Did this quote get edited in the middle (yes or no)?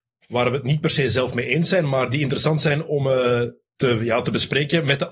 no